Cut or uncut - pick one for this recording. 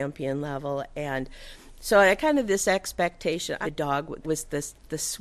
cut